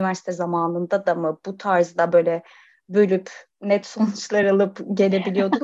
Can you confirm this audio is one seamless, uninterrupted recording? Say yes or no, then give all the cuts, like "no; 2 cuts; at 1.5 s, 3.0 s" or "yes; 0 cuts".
yes; 0 cuts